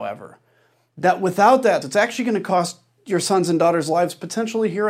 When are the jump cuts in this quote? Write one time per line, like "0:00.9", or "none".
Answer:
0:01.8